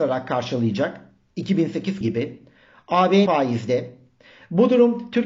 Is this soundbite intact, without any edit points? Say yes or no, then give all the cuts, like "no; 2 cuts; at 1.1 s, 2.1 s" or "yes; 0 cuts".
no; 2 cuts; at 2.0 s, 3.3 s